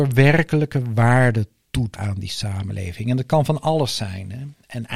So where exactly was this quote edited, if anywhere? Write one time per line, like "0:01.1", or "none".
0:01.9